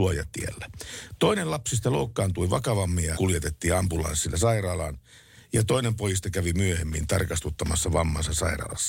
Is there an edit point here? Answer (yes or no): yes